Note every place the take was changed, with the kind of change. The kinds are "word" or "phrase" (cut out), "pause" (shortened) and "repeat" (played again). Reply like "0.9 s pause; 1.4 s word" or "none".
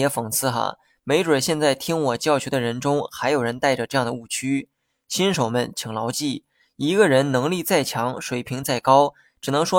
none

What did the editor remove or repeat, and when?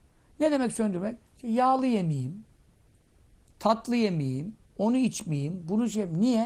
1.3 s pause

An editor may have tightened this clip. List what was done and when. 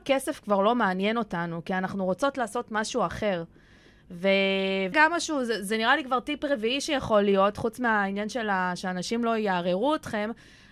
4.9 s word

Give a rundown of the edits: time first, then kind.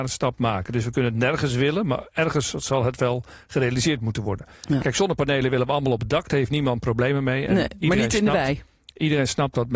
4.6 s pause

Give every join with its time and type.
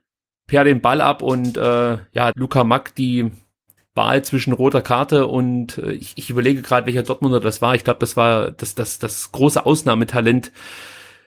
2.3 s phrase

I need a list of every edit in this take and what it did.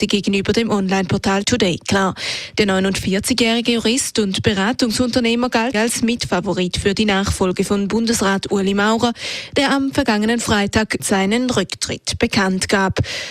1.4 s word; 5.7 s phrase; 11.0 s word

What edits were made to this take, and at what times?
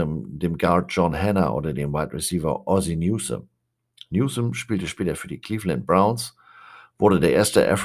none

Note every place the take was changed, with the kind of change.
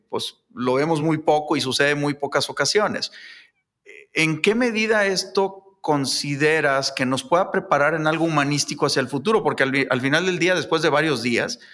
none

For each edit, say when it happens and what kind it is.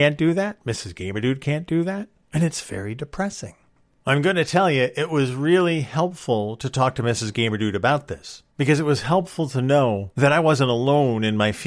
none

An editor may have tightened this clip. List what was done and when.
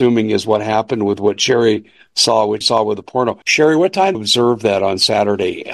2.6 s word; 3.4 s pause; 4.1 s phrase

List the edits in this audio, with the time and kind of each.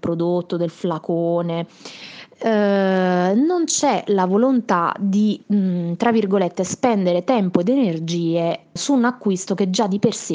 5.4 s pause; 8.8 s word

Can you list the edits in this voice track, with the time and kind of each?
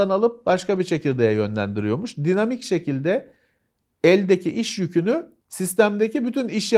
5.4 s pause

